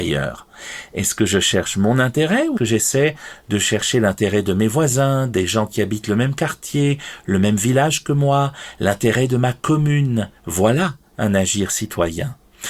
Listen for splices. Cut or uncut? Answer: cut